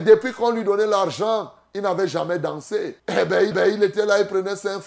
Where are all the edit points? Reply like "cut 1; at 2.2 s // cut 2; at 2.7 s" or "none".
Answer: cut 1; at 3.0 s // cut 2; at 3.5 s